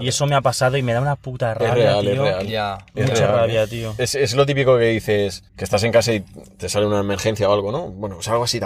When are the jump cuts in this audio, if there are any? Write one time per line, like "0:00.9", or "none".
0:05.5

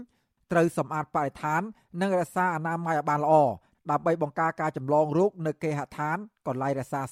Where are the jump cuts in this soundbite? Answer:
none

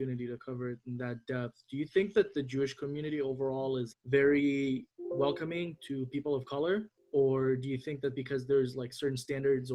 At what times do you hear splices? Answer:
0:03.9
0:04.9
0:07.0

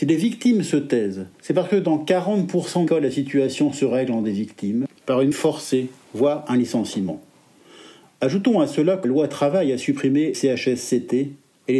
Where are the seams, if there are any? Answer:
0:01.3
0:02.9
0:04.2
0:05.0
0:05.3
0:09.0
0:10.3

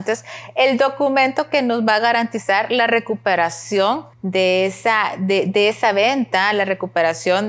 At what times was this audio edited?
0:04.1

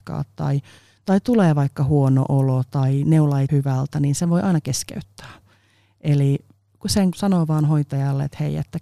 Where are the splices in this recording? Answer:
0:03.5
0:07.1

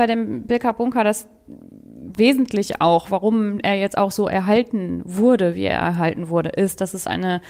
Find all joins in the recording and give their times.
none

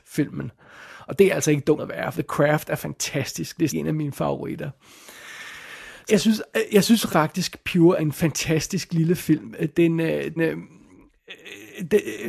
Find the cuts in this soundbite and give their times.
0:01.8
0:02.1
0:03.7
0:06.1
0:07.1
0:08.0
0:10.4

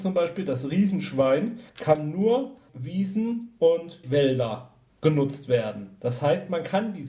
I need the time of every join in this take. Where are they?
0:01.7
0:02.7
0:04.0
0:04.9

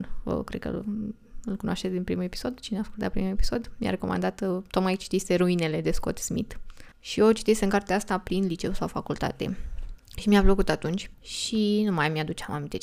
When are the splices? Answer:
0:06.9

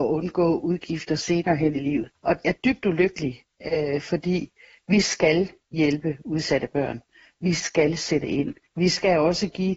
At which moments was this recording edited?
0:02.4

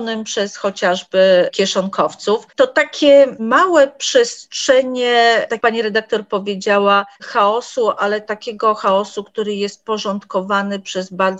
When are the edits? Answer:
0:02.5
0:05.6
0:07.1

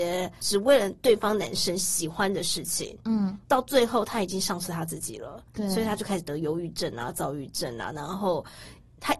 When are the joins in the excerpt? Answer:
0:03.4
0:05.5

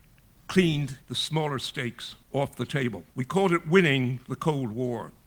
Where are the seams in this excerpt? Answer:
0:01.0
0:02.2
0:03.1

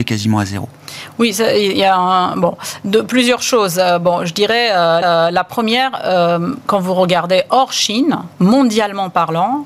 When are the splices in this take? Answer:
0:05.0

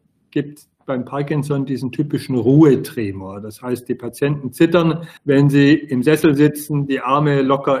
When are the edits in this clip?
0:05.2

